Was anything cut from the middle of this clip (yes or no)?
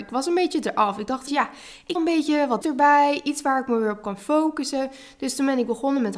yes